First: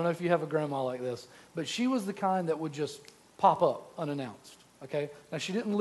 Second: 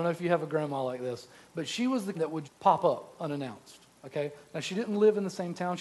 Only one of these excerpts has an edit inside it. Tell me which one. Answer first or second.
second